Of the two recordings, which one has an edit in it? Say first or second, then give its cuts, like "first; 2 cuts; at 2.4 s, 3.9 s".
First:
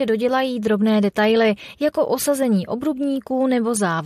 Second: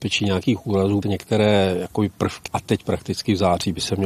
second; 2 cuts; at 1.0 s, 2.5 s